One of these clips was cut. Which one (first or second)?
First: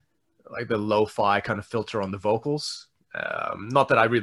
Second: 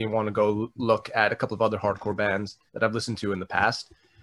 second